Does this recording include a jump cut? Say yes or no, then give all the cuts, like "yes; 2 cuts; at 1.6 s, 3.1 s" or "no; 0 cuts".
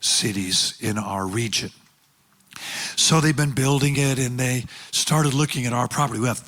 no; 0 cuts